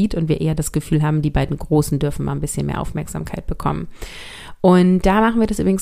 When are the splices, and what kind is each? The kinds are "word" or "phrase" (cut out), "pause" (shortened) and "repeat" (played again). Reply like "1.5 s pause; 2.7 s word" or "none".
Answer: none